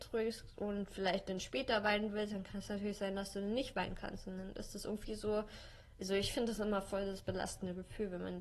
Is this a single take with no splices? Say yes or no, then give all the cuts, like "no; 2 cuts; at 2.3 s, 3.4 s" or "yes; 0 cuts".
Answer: yes; 0 cuts